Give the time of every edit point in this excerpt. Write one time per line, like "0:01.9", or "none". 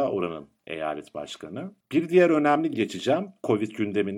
0:02.7